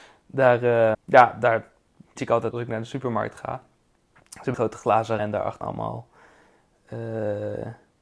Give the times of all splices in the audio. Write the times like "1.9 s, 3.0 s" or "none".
0.9 s, 2.2 s, 2.5 s, 4.5 s, 5.2 s, 5.6 s